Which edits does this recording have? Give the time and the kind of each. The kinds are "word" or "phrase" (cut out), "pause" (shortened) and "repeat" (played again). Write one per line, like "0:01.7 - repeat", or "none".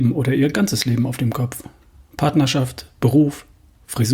none